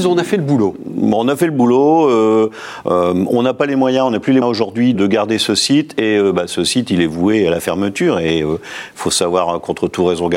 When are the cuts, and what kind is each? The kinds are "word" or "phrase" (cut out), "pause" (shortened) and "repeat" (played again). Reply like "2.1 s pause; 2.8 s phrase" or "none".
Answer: 4.4 s word; 4.9 s word